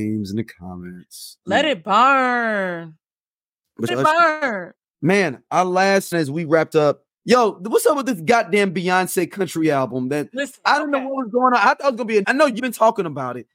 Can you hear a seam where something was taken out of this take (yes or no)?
yes